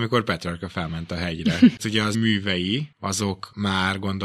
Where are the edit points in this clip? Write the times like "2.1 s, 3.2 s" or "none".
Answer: 1.8 s, 2.1 s